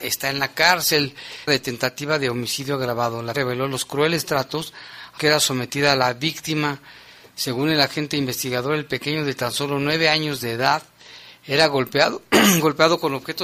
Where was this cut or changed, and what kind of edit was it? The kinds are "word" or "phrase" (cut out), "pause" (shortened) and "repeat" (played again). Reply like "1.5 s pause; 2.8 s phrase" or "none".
1.5 s word; 3.3 s word; 5.2 s word